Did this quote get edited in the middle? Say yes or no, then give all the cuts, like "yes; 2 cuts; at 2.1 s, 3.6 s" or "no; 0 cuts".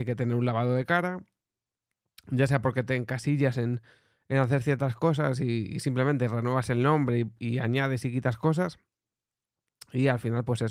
no; 0 cuts